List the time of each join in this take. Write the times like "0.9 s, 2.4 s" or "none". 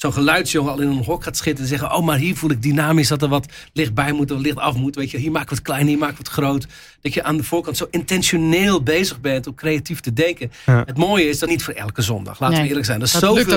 11.5 s